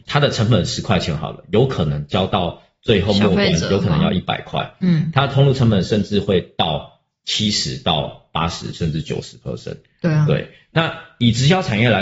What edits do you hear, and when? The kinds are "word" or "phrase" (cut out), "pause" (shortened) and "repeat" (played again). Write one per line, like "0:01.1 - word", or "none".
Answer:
none